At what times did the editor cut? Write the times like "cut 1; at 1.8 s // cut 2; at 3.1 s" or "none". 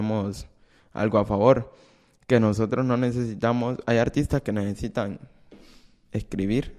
none